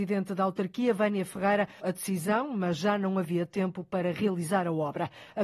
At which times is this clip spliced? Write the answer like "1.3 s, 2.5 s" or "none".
1.8 s